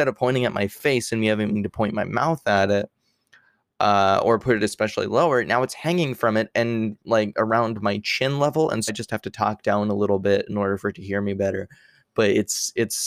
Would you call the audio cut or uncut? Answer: cut